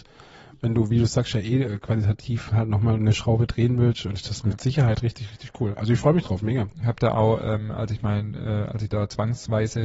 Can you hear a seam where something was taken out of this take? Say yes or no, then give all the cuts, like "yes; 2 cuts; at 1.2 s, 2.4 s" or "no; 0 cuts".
no; 0 cuts